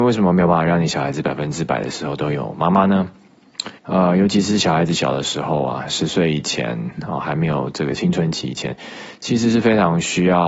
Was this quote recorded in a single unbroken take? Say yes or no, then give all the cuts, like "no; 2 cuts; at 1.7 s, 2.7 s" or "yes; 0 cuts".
no; 1 cut; at 3.8 s